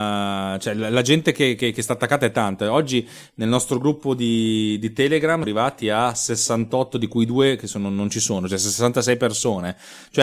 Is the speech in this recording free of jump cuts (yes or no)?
no